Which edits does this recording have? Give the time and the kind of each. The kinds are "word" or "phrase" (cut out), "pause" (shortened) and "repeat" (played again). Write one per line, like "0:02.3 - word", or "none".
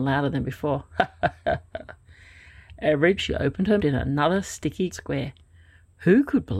0:03.2 - word
0:03.8 - phrase
0:04.9 - word